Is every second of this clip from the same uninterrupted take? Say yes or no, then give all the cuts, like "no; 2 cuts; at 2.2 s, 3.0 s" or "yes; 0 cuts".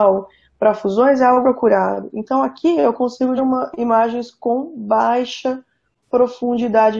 no; 2 cuts; at 1.4 s, 3.4 s